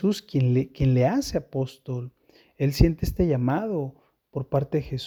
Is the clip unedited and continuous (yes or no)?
yes